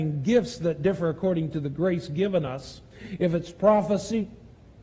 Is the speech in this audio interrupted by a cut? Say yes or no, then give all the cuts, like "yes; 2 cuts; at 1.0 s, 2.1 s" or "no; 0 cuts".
no; 0 cuts